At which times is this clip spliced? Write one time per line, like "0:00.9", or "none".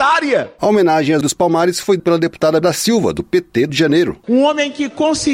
0:01.2
0:02.0
0:02.6
0:03.7